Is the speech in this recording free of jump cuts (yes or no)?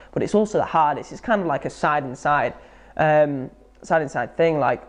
yes